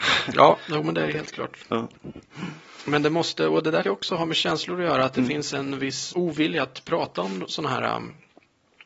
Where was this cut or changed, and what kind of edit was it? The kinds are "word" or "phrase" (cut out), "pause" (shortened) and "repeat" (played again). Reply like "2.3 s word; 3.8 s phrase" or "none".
3.8 s word; 6.1 s word